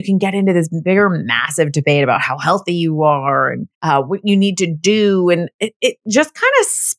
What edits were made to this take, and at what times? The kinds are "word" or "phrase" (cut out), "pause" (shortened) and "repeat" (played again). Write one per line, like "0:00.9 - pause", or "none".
0:03.7 - pause